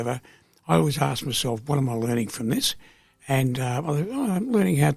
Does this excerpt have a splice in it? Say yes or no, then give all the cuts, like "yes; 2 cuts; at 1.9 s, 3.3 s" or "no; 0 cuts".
no; 0 cuts